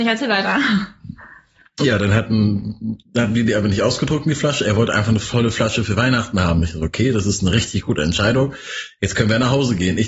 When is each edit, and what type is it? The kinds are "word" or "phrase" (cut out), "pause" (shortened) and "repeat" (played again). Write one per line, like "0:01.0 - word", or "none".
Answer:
none